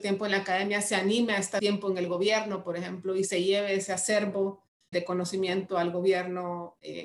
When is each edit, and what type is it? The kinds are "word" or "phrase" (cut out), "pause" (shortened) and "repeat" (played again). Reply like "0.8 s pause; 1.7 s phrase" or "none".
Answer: 1.6 s word; 4.9 s word